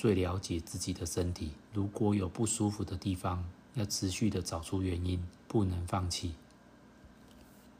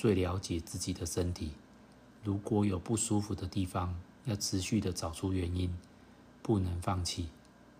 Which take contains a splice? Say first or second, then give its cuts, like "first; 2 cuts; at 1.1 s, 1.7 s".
first; 2 cuts; at 1.7 s, 5.4 s